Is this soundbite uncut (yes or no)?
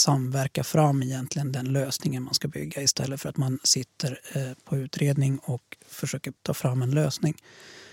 no